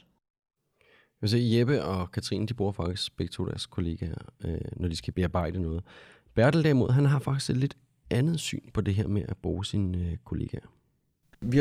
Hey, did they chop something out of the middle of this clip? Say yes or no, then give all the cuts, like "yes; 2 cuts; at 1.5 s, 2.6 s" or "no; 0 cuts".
no; 0 cuts